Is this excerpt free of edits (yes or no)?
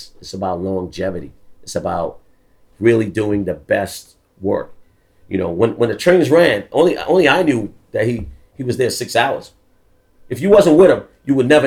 yes